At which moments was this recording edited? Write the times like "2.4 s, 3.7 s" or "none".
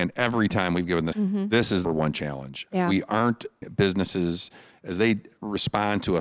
1.1 s, 1.8 s, 3.6 s